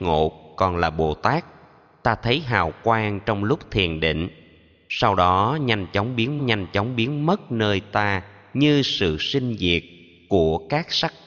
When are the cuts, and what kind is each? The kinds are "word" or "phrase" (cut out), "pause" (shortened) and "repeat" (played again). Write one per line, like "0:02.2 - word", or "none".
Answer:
0:06.4 - repeat